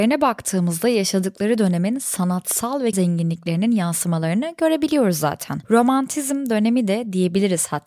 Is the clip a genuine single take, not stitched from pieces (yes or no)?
no